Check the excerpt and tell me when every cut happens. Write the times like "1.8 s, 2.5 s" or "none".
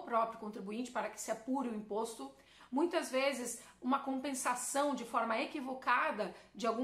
none